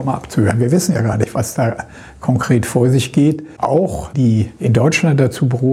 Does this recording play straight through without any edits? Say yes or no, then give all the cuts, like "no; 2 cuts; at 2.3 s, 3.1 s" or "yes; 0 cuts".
yes; 0 cuts